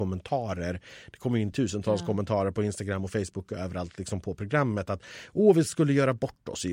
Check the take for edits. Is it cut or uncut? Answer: uncut